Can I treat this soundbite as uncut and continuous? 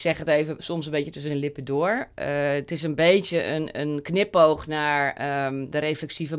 no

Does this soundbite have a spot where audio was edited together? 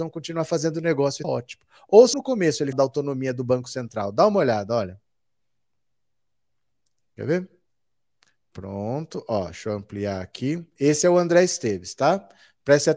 yes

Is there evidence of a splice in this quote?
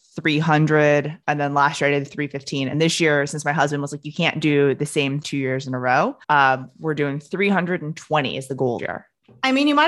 yes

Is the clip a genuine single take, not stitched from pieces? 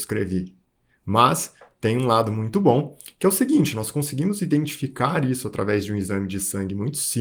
yes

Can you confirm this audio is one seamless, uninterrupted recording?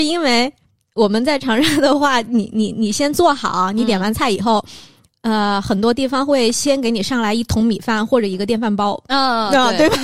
yes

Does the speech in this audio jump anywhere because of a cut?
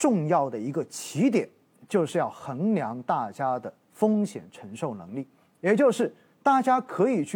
yes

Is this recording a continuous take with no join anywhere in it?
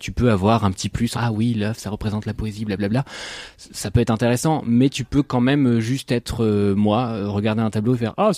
no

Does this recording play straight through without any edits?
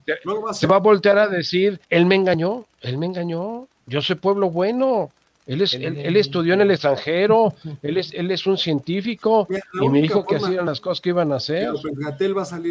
no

